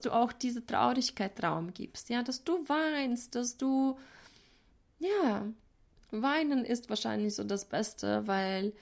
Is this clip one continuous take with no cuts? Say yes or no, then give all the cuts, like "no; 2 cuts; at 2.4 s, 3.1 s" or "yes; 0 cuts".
yes; 0 cuts